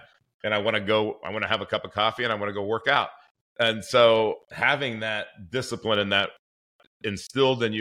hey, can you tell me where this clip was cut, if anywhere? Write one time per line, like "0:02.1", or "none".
none